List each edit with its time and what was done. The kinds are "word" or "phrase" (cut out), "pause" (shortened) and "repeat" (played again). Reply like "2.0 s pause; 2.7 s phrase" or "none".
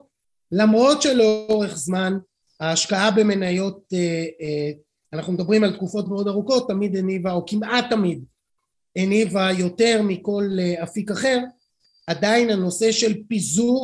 6.1 s word